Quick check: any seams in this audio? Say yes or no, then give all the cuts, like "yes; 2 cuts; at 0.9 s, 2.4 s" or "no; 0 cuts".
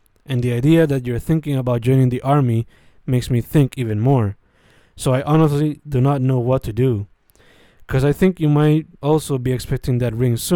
no; 0 cuts